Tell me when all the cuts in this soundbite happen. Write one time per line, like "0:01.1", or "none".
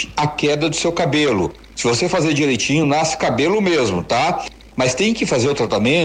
none